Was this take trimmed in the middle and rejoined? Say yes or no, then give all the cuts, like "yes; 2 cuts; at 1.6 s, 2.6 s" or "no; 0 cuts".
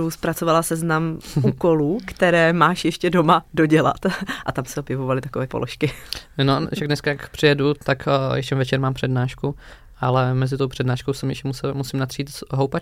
yes; 1 cut; at 5.5 s